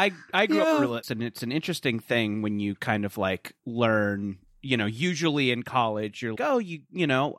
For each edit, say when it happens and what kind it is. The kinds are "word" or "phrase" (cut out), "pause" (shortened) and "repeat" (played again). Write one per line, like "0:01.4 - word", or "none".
0:01.0 - word
0:03.6 - pause
0:06.4 - word